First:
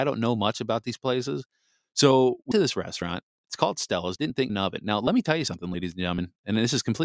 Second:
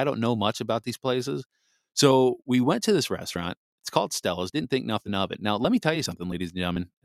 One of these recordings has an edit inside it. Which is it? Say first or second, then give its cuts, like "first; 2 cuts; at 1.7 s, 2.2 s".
first; 2 cuts; at 2.5 s, 4.5 s